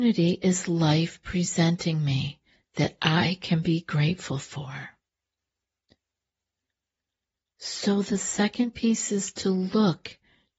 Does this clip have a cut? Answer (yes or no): no